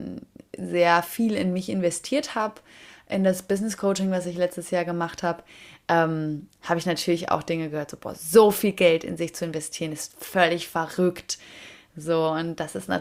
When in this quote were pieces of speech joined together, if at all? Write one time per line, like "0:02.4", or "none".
none